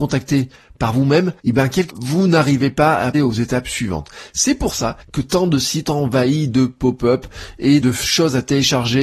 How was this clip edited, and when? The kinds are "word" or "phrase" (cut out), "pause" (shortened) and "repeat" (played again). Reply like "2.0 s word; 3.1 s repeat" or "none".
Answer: 1.4 s pause; 1.9 s word; 3.1 s word; 4.7 s phrase; 5.0 s pause; 5.8 s word; 7.8 s word